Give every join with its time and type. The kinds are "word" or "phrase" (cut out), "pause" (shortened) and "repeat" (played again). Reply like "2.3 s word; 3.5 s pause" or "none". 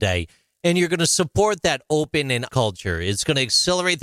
2.5 s word